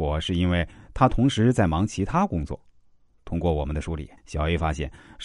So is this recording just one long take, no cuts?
no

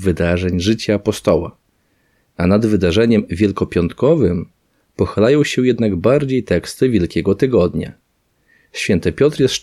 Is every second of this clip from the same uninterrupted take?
yes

